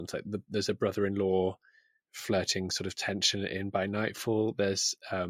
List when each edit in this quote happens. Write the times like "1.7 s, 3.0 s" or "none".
none

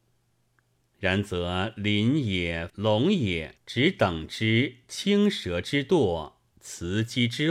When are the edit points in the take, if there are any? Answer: 2.7 s, 3.6 s

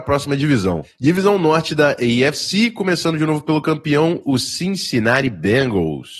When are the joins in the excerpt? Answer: none

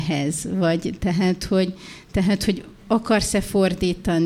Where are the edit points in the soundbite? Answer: none

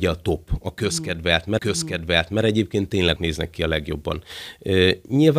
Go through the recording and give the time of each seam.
1.6 s, 3.2 s

